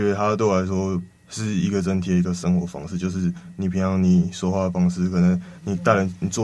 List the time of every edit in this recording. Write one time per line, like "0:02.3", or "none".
0:01.1